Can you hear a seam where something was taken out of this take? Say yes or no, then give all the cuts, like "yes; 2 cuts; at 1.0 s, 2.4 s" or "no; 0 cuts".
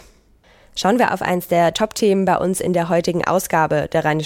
no; 0 cuts